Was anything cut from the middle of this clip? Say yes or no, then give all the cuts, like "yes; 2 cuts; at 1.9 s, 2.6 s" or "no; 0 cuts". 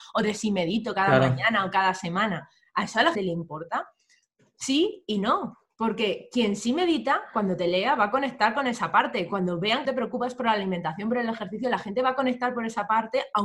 yes; 2 cuts; at 3.1 s, 9.8 s